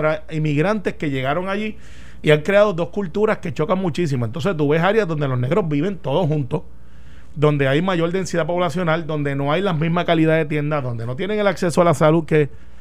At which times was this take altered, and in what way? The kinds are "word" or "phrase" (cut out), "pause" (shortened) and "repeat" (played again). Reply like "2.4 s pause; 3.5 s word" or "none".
none

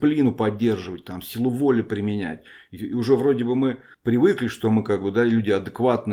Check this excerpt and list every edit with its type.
none

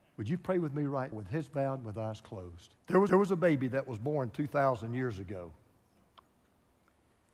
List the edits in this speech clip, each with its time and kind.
1.1 s word; 2.8 s pause; 3.1 s repeat

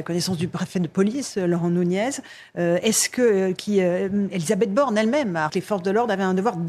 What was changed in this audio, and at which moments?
5.5 s word

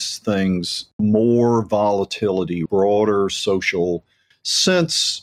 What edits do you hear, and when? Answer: 1.0 s word; 2.7 s phrase; 4.3 s word

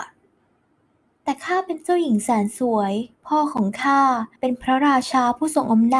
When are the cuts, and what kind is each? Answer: 3.1 s pause; 4.4 s pause

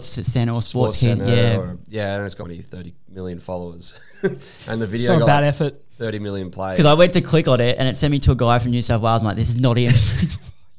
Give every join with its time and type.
2.4 s word

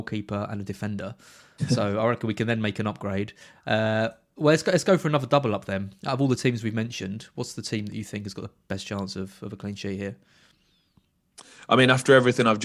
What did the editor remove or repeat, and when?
none

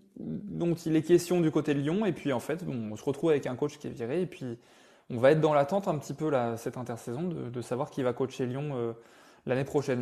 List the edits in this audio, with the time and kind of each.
none

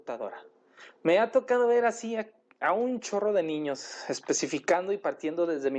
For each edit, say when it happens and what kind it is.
none

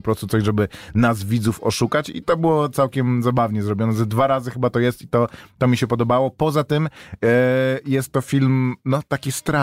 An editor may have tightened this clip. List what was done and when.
none

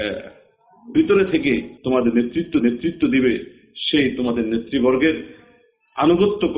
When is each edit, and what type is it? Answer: 0.9 s word; 1.8 s pause; 2.6 s repeat

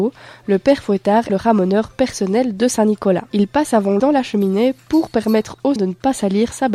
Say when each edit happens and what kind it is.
1.3 s phrase; 4.0 s word; 5.8 s word

